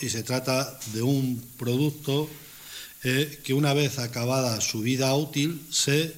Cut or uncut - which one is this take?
uncut